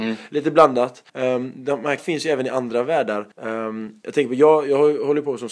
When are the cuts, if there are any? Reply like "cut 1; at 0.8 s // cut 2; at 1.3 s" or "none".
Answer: cut 1; at 1.1 s // cut 2; at 2.0 s // cut 3; at 3.3 s

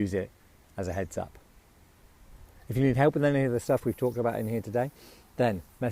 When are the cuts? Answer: none

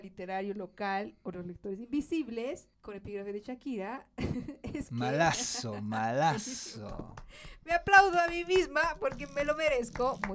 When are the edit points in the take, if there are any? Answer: cut 1; at 2.7 s

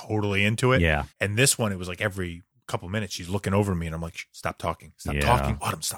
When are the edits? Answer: cut 1; at 1.1 s

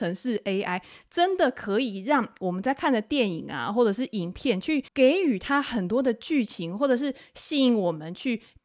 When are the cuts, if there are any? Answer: cut 1; at 4.9 s

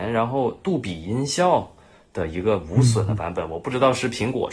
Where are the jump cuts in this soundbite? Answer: none

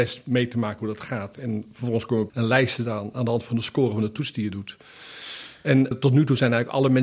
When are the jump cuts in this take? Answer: cut 1; at 2.3 s // cut 2; at 5.9 s

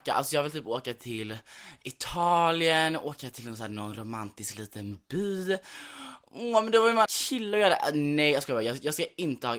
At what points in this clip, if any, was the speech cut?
cut 1; at 7.1 s

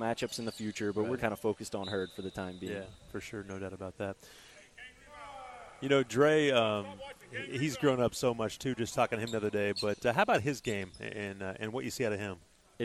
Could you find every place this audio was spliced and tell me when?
cut 1; at 1.2 s

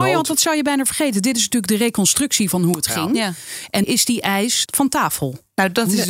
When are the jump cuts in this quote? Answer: cut 1; at 3.8 s // cut 2; at 4.7 s

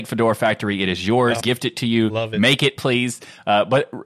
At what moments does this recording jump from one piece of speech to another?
cut 1; at 1.4 s

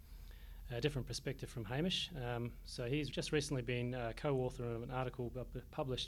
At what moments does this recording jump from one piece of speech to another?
cut 1; at 3.1 s

